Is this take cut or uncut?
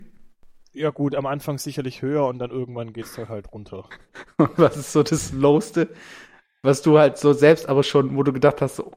uncut